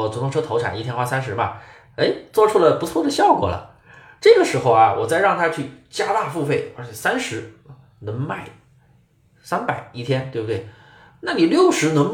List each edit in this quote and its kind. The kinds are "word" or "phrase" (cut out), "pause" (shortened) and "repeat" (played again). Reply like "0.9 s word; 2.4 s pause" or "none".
none